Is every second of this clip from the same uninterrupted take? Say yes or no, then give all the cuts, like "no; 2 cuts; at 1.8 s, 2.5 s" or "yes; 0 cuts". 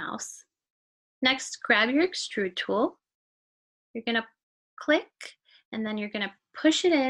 yes; 0 cuts